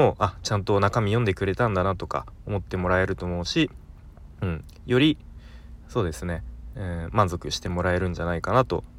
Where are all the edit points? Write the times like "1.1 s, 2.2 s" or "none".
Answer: none

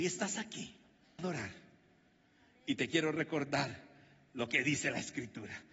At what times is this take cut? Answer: 1.2 s

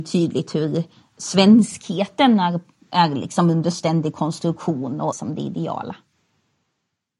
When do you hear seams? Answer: 5.1 s

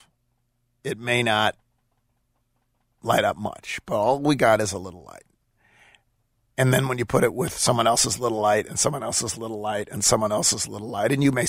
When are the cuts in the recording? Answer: none

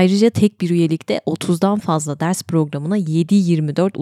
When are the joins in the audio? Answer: none

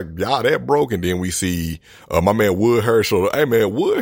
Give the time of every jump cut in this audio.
none

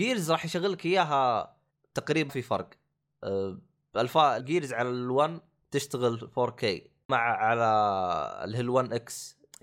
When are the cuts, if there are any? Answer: 2.3 s, 4.4 s, 7.1 s

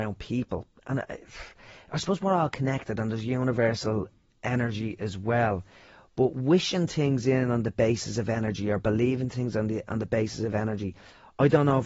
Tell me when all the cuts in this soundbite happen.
none

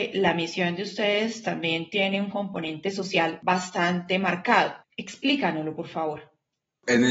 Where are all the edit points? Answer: none

